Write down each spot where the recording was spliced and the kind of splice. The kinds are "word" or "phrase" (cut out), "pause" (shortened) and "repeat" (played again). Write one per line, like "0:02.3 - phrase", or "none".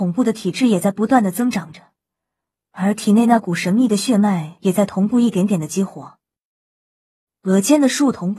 none

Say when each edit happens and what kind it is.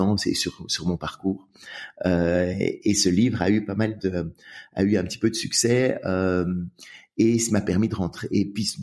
none

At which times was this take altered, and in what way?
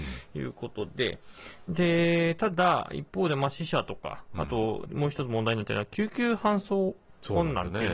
0:04.9 - word

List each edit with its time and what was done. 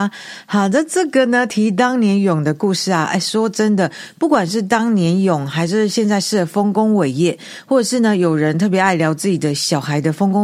none

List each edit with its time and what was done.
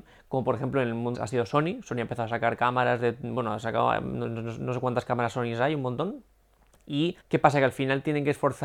0:01.1 - phrase
0:07.2 - pause

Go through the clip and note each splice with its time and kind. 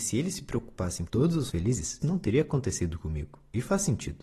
0:01.1 - word
0:01.5 - word
0:02.0 - word

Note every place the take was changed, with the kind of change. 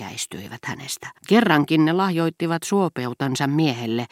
0:01.2 - pause

